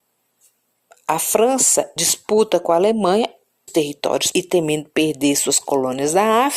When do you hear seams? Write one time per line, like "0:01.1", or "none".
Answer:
0:02.0
0:03.7
0:04.3